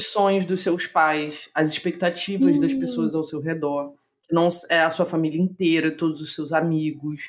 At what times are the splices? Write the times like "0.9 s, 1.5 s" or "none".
none